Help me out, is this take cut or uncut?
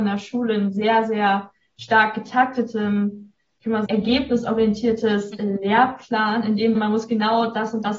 cut